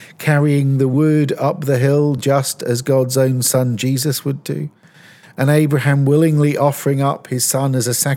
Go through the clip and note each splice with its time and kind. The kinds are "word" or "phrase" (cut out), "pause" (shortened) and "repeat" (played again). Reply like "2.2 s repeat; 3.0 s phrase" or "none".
none

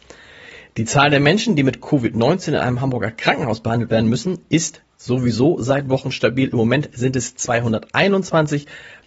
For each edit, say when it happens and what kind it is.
none

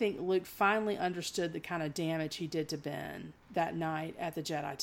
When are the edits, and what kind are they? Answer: 3.4 s pause

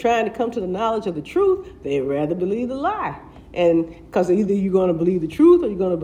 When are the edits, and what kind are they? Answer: none

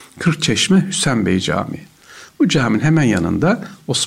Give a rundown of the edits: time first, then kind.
none

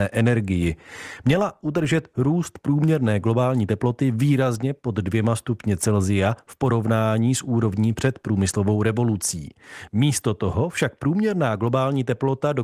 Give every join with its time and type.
none

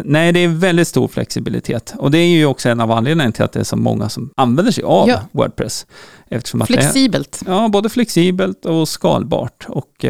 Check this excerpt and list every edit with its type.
4.3 s pause

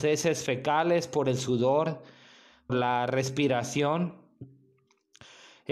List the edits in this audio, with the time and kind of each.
2.7 s word

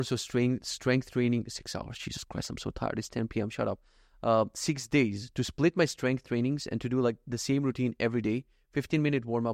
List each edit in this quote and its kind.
none

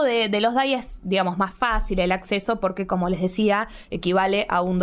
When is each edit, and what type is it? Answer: none

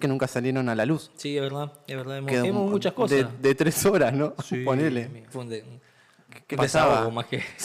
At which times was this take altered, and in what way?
5.3 s word; 6.5 s word

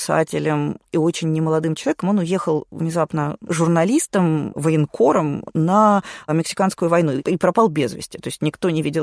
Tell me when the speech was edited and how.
none

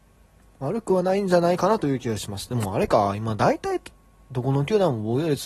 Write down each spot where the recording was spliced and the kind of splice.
none

